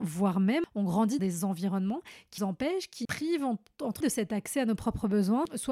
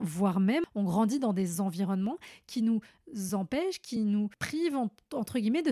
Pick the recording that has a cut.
first; 4 cuts; at 1.2 s, 2.4 s, 3.0 s, 4.0 s

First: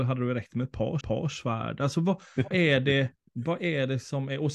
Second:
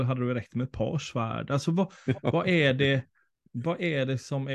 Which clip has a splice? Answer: first; 3 cuts; at 1.0 s, 2.5 s, 3.2 s

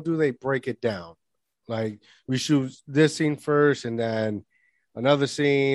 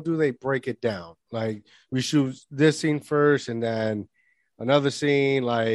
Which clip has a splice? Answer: second; 1 cut; at 1.2 s

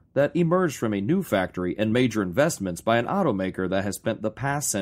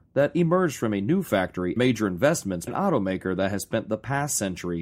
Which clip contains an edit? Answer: second; 2 cuts; at 1.8 s, 2.7 s

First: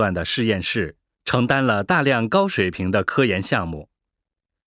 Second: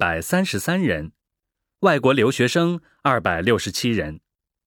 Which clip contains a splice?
first; 1 cut; at 1.0 s

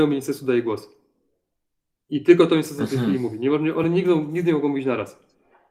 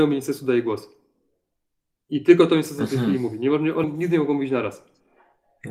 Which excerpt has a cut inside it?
second; 1 cut; at 3.8 s

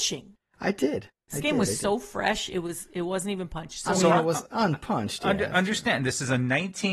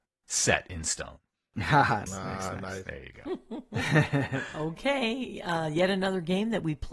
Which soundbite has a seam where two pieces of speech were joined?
second; 1 cut; at 2.1 s

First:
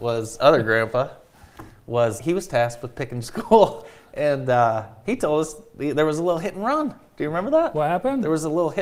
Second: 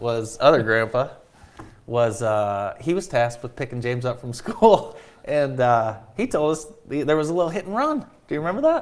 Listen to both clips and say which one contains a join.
first; 2 cuts; at 2.2 s, 3.2 s

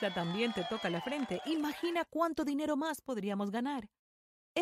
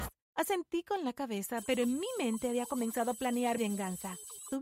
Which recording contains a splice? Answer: second; 1 cut; at 3.6 s

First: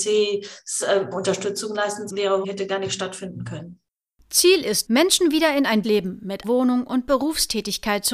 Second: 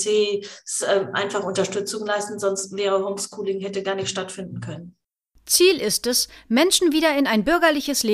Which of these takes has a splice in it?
first; 6 cuts; at 1.1 s, 2.1 s, 2.4 s, 4.9 s, 5.8 s, 6.4 s

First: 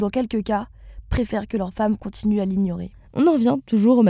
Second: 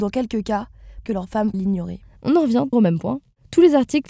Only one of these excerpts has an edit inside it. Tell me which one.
second; 3 cuts; at 1.1 s, 1.5 s, 2.7 s

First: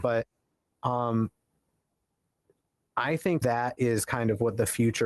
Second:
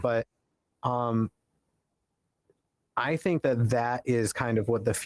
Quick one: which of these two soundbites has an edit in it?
first; 1 cut; at 3.4 s

